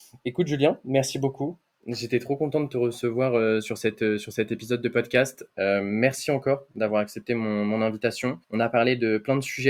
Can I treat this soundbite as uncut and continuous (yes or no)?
no